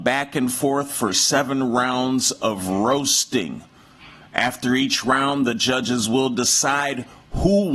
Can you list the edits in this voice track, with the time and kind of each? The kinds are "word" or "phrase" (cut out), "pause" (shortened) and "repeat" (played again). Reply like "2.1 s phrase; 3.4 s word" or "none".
none